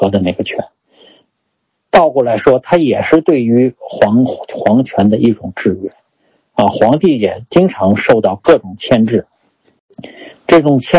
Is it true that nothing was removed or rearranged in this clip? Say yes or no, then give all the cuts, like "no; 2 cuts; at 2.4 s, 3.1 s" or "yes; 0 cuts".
yes; 0 cuts